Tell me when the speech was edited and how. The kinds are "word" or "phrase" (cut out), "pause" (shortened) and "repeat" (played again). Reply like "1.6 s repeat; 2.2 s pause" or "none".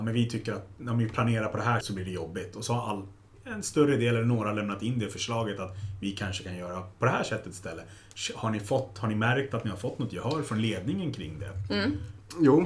1.8 s word